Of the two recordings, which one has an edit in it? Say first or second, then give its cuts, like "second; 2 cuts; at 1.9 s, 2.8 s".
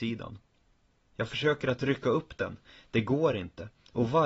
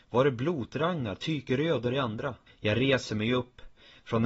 second; 1 cut; at 2.5 s